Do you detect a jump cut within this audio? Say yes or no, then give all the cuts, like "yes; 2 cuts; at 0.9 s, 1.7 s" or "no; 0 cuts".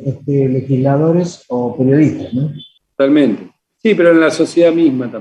no; 0 cuts